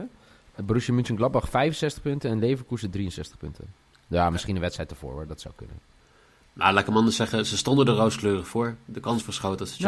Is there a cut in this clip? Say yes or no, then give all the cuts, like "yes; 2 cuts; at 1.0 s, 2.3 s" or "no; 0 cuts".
no; 0 cuts